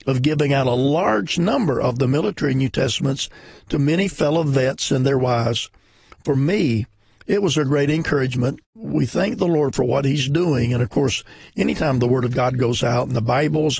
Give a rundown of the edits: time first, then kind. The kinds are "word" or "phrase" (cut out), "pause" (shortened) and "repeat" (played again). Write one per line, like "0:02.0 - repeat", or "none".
0:08.7 - pause